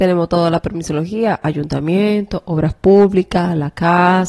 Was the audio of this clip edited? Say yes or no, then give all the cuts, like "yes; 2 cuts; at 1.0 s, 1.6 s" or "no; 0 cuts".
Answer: no; 0 cuts